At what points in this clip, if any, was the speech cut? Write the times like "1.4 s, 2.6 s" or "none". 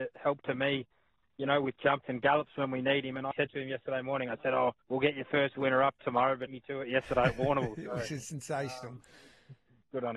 2.0 s, 3.3 s, 4.8 s, 6.5 s